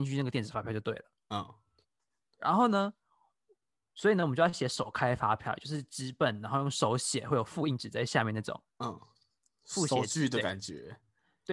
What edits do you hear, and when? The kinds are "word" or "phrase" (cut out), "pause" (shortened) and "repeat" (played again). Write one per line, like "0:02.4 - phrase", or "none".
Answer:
0:08.7 - pause